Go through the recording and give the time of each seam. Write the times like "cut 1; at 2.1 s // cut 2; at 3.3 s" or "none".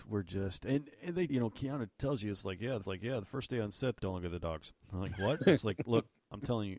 cut 1; at 1.3 s // cut 2; at 1.9 s // cut 3; at 2.8 s // cut 4; at 4.0 s // cut 5; at 4.8 s